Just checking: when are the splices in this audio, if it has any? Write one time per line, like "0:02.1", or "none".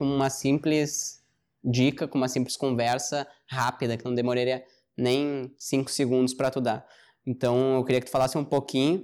none

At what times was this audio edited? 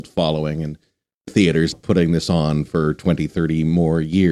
0:01.3
0:01.7

